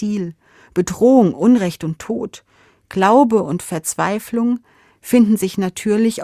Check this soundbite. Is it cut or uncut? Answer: uncut